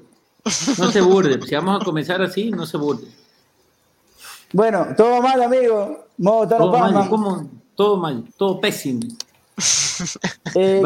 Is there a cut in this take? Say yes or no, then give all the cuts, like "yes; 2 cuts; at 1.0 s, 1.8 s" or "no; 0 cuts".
yes; 1 cut; at 8.3 s